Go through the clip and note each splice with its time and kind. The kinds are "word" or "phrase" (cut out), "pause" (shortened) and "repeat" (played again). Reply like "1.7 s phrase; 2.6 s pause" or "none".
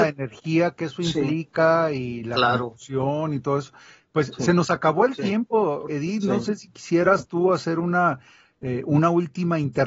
5.9 s word